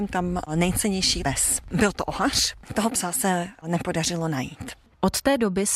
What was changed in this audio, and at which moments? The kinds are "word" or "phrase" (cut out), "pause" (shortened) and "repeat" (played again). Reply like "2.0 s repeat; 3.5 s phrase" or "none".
1.2 s word

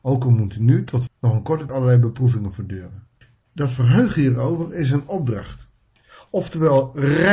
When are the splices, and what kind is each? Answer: 1.1 s word; 1.7 s word; 3.2 s pause

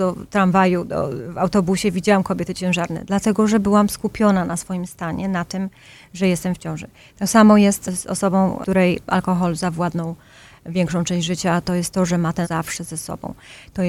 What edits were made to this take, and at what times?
12.4 s word

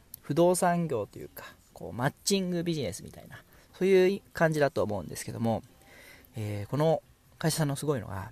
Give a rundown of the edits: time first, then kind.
none

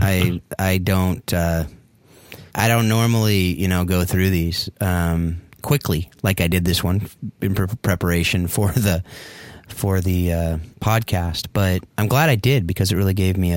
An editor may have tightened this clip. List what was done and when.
2.5 s pause; 5.5 s pause; 10.7 s pause; 11.9 s pause

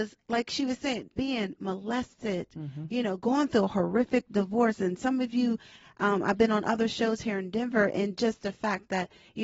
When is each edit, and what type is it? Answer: none

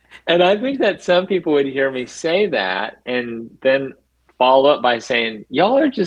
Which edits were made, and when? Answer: none

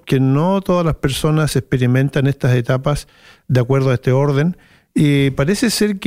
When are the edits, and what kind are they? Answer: none

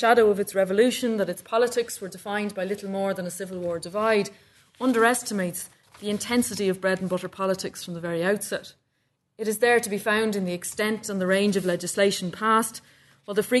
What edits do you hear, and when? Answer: none

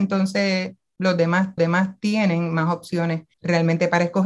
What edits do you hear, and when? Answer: 1.6 s repeat; 3.3 s pause

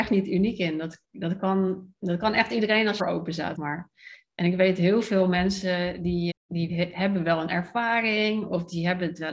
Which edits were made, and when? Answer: 3.0 s phrase; 3.6 s word; 6.3 s word

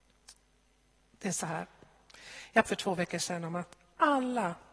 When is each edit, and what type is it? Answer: 2.6 s word

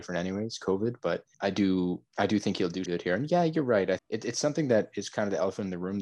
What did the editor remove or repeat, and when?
1.3 s pause; 2.1 s pause; 2.9 s word; 4.0 s word

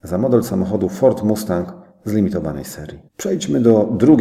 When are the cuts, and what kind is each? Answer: 3.1 s pause

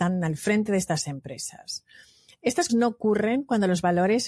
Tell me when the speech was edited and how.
2.7 s word

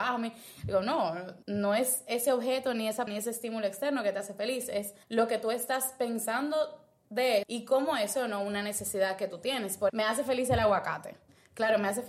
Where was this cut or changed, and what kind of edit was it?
1.4 s pause; 3.1 s word; 5.0 s pause; 7.4 s word; 8.1 s word; 9.9 s word

